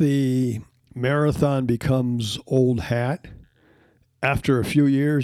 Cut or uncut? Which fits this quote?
uncut